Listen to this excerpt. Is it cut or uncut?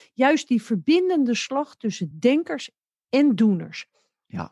uncut